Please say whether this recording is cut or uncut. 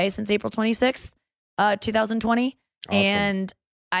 uncut